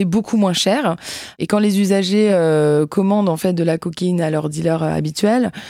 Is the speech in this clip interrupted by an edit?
no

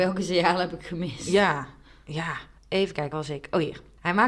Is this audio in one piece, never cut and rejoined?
no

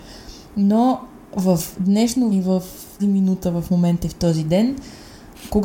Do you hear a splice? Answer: yes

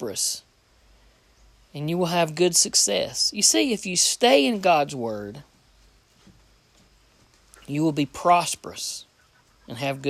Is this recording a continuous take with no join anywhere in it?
yes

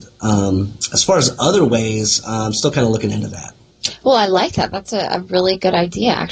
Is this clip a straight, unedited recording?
yes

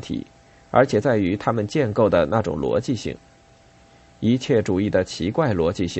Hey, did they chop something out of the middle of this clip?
no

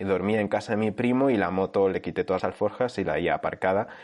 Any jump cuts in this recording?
yes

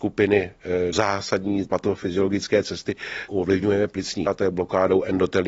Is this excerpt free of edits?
no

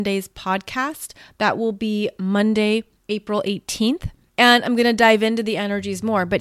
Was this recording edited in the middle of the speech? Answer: no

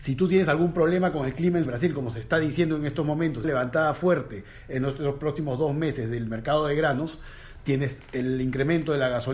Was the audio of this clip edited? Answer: yes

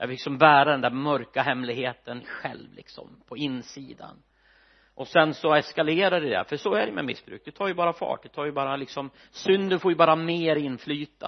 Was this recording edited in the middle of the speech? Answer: no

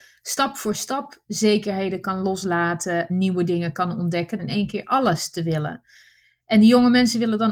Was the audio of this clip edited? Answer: yes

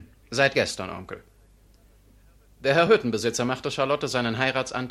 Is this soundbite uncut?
yes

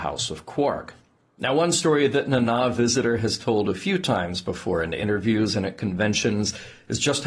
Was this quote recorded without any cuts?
yes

